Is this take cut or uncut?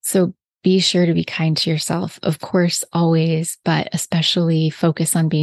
uncut